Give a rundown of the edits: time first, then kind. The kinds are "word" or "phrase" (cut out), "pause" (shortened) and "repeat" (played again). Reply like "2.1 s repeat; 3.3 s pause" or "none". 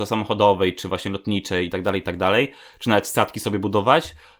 none